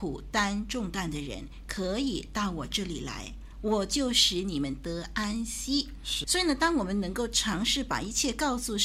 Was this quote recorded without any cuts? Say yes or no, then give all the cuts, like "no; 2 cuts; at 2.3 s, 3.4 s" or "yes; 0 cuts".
no; 1 cut; at 6.2 s